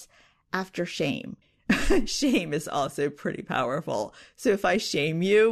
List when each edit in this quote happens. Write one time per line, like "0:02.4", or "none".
0:01.4